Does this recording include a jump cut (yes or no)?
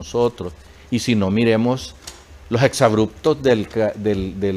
no